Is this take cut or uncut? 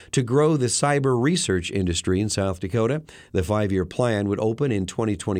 uncut